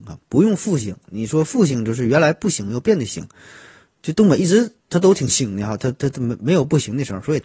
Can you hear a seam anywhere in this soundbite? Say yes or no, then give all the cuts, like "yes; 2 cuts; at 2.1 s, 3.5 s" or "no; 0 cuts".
yes; 1 cut; at 4.8 s